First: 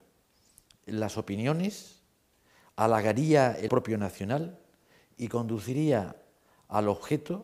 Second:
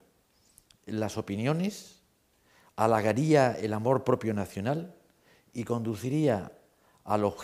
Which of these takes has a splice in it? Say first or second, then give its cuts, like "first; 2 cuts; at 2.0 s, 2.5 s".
first; 1 cut; at 3.7 s